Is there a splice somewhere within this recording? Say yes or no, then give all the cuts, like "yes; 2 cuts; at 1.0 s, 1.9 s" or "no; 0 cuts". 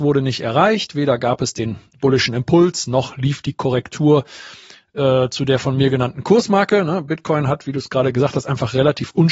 no; 0 cuts